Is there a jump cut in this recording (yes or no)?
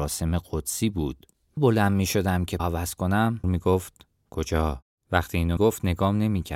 yes